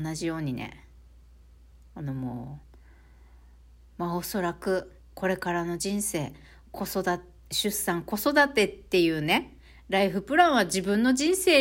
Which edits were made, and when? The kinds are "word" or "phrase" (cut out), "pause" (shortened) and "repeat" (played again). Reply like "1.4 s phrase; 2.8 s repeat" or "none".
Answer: 2.6 s pause; 5.0 s pause